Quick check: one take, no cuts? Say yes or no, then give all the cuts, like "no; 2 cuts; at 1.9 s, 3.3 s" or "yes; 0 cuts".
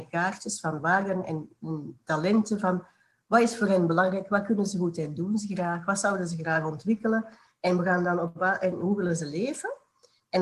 yes; 0 cuts